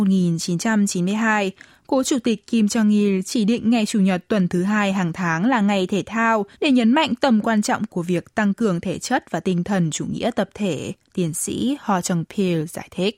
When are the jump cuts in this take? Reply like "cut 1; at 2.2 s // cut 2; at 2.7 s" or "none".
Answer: cut 1; at 6.5 s // cut 2; at 11.0 s